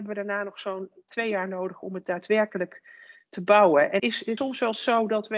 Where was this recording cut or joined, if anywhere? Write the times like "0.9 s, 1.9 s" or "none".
1.1 s, 4.0 s, 4.4 s